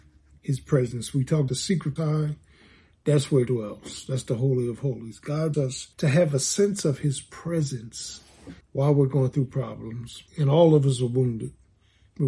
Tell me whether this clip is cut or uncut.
cut